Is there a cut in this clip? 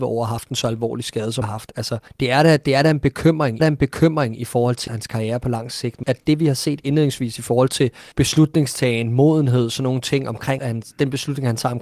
yes; 7 cuts; at 1.4 s, 2.1 s, 3.6 s, 4.9 s, 6.0 s, 8.1 s, 10.6 s

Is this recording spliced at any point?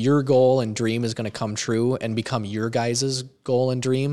no; 0 cuts

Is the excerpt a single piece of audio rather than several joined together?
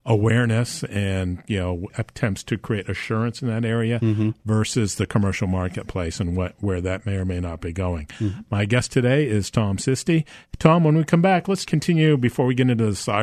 no; 2 cuts; at 1.9 s, 11.7 s

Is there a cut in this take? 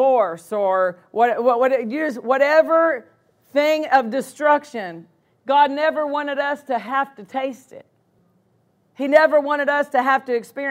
no; 0 cuts

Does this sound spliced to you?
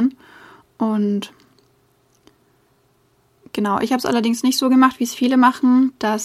no; 0 cuts

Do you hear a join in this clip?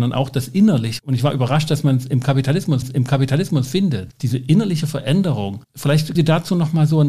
yes; 2 cuts; at 2.8 s, 6.2 s

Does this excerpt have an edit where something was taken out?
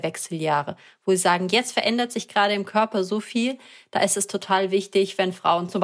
no; 0 cuts

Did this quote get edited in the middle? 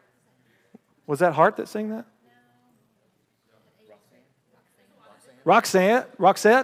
no; 0 cuts

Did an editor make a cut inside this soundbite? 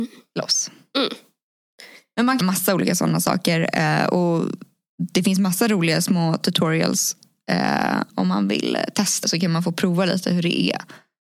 yes; 3 cuts; at 2.4 s, 8.1 s, 9.2 s

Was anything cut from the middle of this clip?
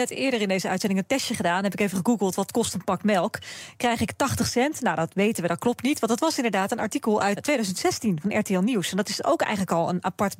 yes; 1 cut; at 7.4 s

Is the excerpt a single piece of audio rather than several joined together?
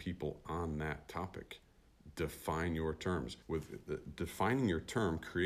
no; 1 cut; at 3.4 s

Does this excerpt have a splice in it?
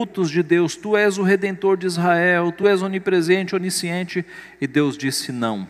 no; 0 cuts

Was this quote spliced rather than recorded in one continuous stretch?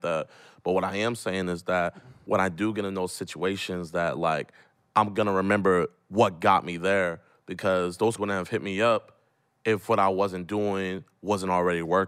yes; 1 cut; at 8.2 s

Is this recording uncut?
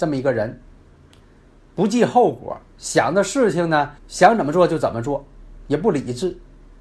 no; 1 cut; at 4.0 s

